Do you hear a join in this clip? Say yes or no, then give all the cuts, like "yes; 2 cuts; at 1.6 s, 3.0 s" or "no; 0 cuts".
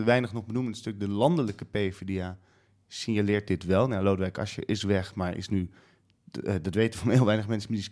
no; 0 cuts